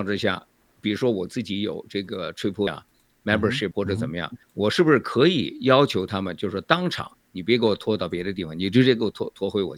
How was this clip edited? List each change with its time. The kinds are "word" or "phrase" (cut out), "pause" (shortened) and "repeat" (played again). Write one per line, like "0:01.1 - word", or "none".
0:02.7 - word
0:03.7 - word
0:04.4 - pause